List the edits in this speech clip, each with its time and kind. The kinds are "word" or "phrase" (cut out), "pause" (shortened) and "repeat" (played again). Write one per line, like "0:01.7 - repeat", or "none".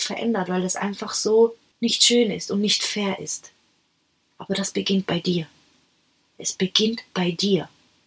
none